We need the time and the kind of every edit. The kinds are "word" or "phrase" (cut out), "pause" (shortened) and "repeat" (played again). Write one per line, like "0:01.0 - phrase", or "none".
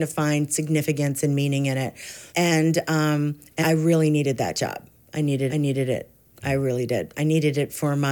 0:02.3 - pause
0:03.6 - word
0:05.5 - repeat